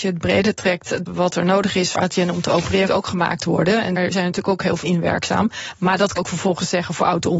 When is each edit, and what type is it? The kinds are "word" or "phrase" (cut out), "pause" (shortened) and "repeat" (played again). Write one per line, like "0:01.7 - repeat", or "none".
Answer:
0:01.1 - word
0:01.9 - word
0:02.9 - word
0:04.0 - word
0:04.8 - word
0:06.2 - word

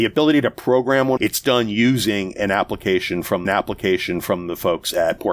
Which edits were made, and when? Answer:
0:01.2 - phrase
0:03.5 - repeat

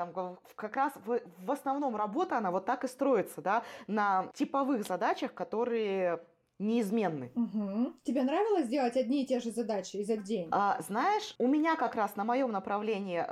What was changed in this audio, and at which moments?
0:10.2 - word

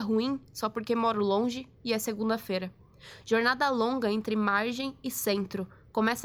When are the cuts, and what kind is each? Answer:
none

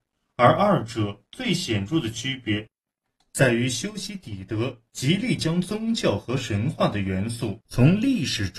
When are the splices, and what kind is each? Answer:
none

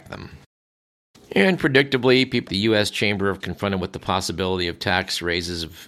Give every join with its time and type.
0:02.5 - word
0:03.4 - word

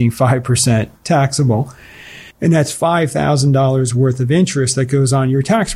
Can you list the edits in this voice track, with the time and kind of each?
0:02.3 - pause

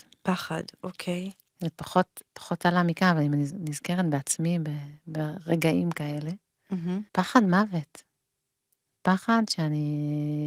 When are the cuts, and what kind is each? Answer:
0:01.5 - pause
0:07.1 - pause

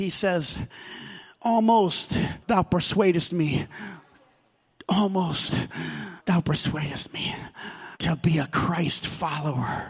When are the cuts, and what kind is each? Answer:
0:02.4 - pause
0:06.2 - pause
0:07.9 - pause

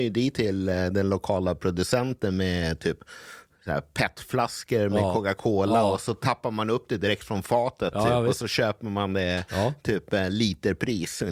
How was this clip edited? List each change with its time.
none

